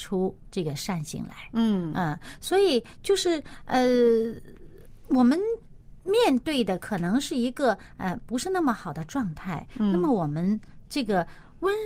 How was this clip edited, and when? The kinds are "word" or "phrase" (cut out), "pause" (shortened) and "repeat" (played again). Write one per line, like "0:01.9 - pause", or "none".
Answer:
0:06.0 - pause
0:10.8 - pause